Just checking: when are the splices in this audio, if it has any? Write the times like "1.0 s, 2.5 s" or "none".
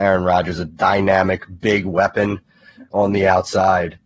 none